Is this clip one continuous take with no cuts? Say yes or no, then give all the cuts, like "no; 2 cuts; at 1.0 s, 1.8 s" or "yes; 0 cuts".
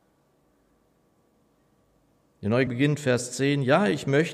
no; 1 cut; at 2.7 s